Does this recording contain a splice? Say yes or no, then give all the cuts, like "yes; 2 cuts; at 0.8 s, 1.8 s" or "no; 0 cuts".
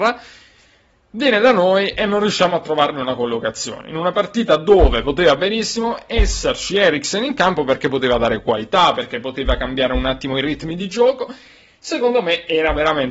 no; 0 cuts